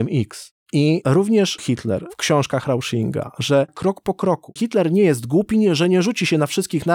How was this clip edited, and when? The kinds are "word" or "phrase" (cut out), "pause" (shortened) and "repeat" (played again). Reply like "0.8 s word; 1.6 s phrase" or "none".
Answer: 1.6 s word; 3.7 s phrase; 4.6 s word